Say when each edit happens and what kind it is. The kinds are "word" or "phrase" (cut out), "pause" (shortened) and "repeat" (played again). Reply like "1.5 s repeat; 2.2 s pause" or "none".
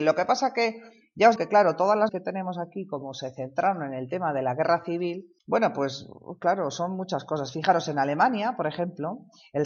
1.4 s word; 2.1 s word; 5.4 s pause